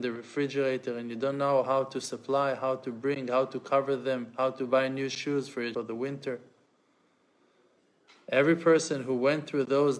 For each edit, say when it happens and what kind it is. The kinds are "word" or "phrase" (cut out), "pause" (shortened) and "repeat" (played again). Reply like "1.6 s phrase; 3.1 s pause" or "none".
5.7 s phrase